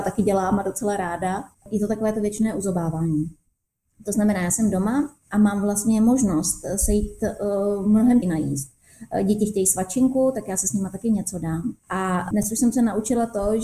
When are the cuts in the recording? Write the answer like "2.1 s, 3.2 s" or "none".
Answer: 1.5 s, 5.2 s, 8.2 s, 11.8 s